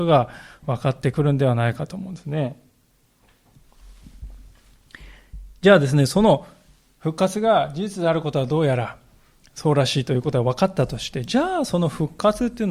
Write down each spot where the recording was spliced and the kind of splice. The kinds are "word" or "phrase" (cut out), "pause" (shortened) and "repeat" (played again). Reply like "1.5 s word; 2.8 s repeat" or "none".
none